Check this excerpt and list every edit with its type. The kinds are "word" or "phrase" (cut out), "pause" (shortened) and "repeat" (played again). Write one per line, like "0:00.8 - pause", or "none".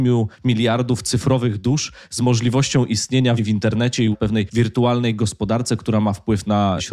0:03.4 - word
0:04.1 - word